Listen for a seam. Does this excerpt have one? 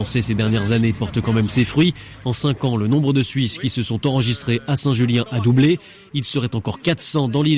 no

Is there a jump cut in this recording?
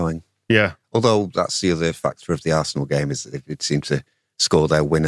no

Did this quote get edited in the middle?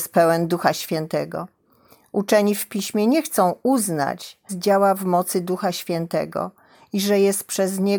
yes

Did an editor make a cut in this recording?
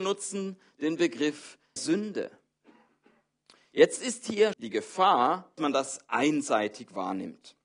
yes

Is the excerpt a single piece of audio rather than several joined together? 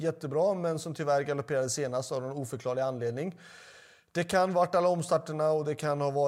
yes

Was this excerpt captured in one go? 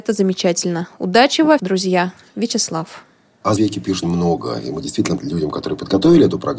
no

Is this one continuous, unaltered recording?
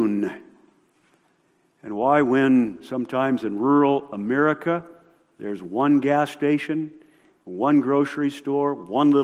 yes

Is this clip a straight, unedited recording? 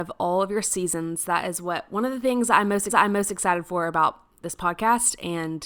no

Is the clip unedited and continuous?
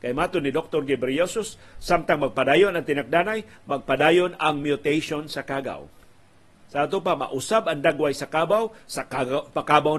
yes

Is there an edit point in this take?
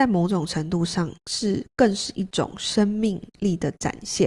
yes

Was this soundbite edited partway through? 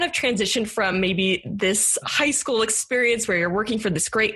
no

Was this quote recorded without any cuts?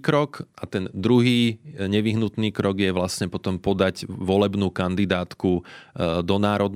yes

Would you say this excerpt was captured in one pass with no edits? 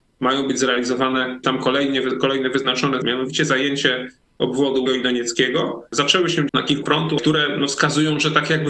no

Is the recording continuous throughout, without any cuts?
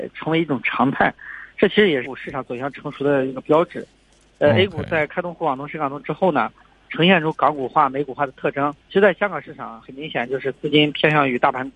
no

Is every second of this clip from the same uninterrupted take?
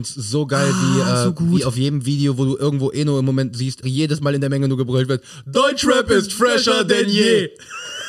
no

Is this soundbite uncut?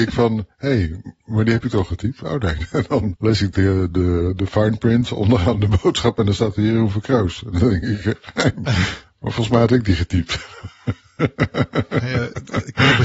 yes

